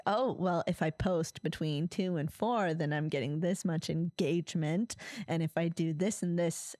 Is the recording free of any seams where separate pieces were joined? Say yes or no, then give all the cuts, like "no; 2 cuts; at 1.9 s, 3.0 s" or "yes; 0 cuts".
yes; 0 cuts